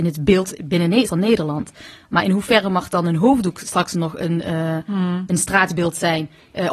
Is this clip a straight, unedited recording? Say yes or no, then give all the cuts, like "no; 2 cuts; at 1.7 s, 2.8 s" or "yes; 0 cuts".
no; 1 cut; at 1.1 s